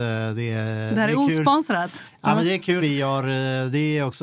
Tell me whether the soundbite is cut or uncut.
cut